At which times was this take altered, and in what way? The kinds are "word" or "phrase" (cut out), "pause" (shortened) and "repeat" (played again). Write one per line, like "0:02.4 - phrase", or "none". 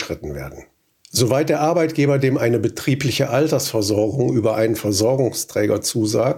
0:02.4 - word